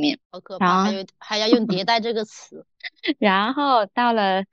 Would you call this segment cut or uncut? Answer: cut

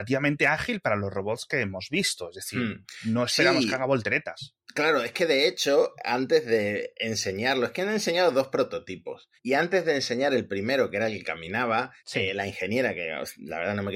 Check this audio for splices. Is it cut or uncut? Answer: cut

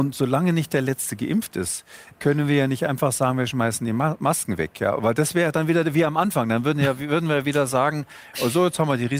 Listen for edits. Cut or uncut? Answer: cut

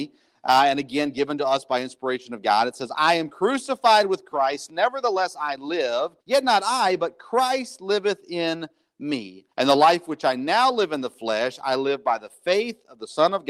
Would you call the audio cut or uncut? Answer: cut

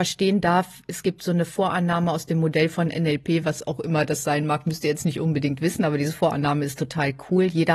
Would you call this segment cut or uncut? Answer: uncut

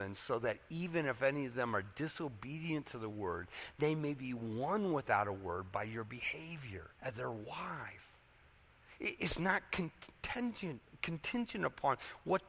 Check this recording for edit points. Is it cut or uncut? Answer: cut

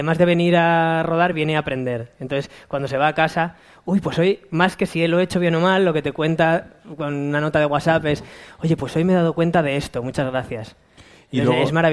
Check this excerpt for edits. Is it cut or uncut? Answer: uncut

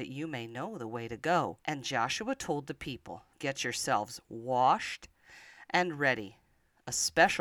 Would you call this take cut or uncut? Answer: cut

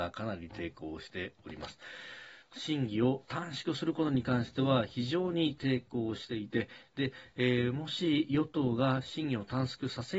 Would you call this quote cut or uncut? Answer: cut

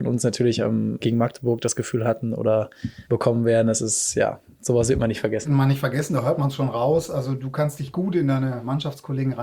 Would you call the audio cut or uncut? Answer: cut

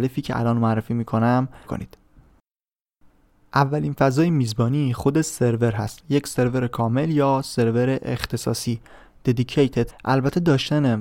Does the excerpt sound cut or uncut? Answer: cut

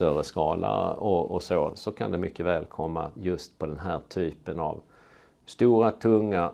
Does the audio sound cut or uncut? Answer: uncut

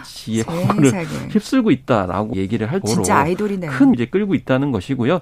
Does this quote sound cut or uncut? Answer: cut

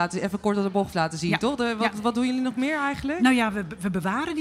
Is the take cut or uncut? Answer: cut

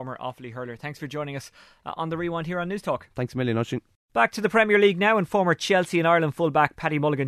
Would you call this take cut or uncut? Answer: uncut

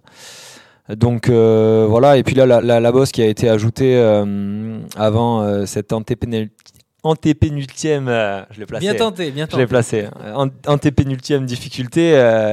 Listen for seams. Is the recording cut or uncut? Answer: cut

